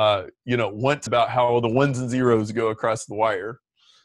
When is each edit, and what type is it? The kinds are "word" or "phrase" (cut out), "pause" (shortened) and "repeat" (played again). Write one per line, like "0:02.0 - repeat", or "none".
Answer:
0:01.1 - word